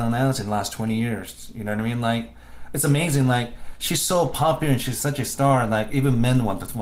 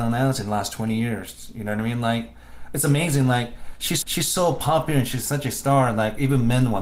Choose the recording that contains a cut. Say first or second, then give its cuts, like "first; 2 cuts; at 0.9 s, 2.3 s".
second; 1 cut; at 4.0 s